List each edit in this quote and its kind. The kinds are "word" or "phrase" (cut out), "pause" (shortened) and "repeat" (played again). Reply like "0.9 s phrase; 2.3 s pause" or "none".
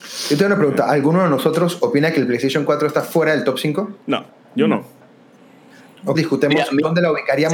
4.3 s pause; 6.1 s word

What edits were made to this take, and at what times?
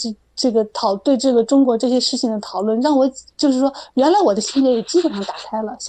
3.3 s pause

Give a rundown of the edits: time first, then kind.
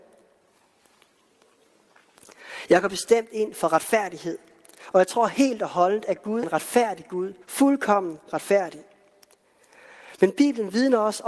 6.4 s word; 7.4 s pause

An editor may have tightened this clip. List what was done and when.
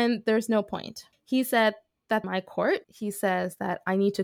1.1 s pause; 2.2 s phrase; 2.8 s pause

